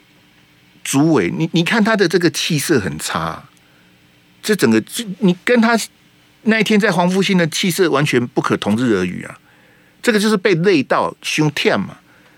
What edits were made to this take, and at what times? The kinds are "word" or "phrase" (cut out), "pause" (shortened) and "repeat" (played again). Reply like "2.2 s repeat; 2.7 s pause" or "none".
none